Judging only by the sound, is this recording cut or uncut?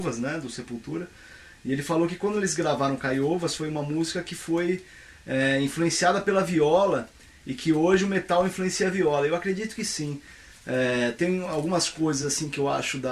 uncut